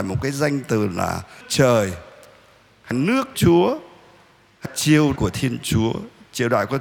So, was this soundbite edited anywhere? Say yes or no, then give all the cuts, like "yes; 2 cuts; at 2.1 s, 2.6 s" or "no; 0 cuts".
yes; 5 cuts; at 1.4 s, 2.9 s, 3.3 s, 4.7 s, 5.2 s